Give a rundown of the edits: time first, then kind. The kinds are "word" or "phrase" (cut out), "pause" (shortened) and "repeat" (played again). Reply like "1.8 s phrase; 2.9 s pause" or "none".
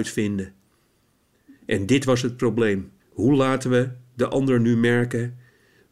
3.0 s pause

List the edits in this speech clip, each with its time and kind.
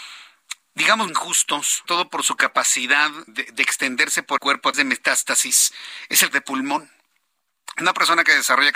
1.1 s word; 1.8 s word; 3.3 s word; 4.4 s word; 4.7 s word; 6.3 s word

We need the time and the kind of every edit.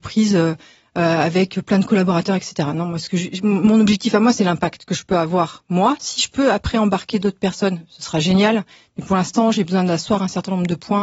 none

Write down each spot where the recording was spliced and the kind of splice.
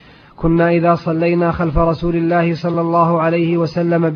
none

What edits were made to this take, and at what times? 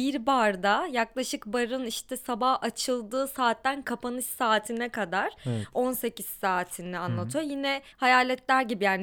7.9 s pause

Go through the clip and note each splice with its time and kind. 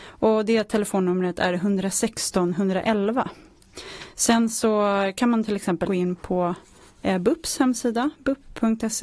5.8 s word

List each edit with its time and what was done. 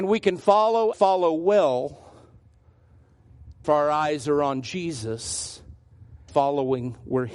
0.9 s word; 3.6 s word; 6.3 s word

